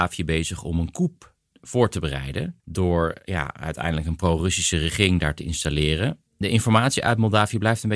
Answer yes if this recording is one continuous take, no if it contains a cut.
no